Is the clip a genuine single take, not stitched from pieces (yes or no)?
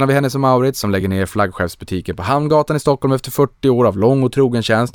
yes